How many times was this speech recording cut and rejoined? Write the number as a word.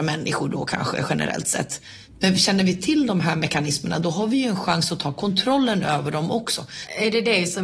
zero